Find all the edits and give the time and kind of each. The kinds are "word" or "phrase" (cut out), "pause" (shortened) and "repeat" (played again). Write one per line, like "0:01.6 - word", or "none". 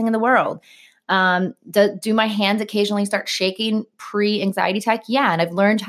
none